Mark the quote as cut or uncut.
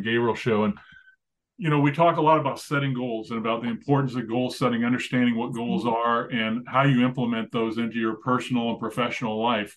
uncut